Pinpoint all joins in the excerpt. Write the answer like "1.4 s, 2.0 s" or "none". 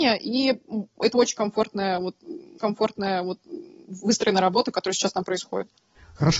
2.6 s